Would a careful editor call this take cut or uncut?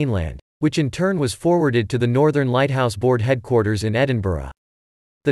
uncut